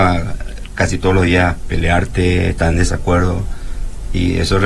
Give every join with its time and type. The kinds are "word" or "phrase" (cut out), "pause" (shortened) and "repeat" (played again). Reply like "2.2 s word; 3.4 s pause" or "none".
none